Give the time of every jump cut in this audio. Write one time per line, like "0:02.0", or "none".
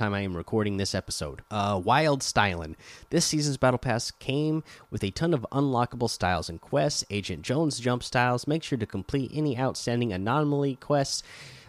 0:01.5